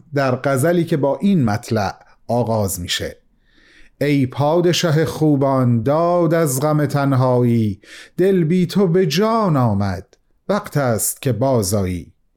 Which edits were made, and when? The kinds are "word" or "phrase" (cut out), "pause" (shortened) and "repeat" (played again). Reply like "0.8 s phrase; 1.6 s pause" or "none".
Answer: none